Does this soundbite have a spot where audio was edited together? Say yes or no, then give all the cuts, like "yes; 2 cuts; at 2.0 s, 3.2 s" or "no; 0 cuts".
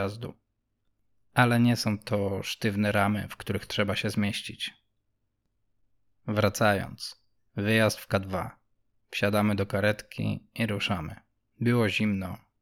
no; 0 cuts